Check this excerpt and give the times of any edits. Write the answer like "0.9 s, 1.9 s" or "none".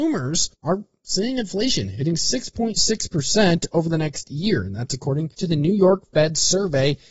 5.3 s